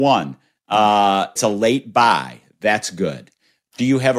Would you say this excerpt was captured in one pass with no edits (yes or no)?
no